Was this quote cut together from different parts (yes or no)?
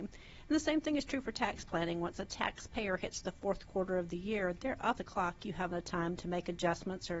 yes